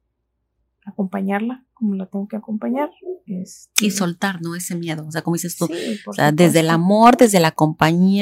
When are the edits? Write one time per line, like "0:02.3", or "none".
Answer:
none